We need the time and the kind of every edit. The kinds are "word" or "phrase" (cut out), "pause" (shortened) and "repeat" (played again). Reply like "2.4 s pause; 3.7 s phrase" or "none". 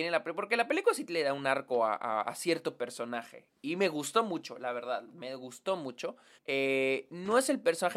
6.4 s pause